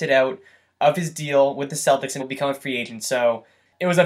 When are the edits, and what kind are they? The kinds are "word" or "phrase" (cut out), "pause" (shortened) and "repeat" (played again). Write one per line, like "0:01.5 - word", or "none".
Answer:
0:02.2 - word